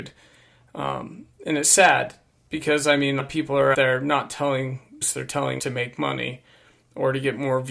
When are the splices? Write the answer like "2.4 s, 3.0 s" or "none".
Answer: 3.2 s, 3.7 s, 5.0 s, 5.6 s